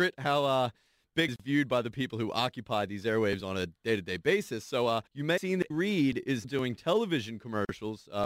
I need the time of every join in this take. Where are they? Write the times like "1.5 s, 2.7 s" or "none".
1.3 s, 5.1 s, 5.4 s, 5.7 s, 6.4 s